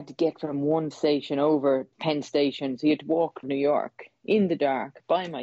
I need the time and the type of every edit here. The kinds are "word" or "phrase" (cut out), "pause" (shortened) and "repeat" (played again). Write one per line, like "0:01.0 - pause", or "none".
0:00.9 - word
0:01.9 - word
0:03.4 - phrase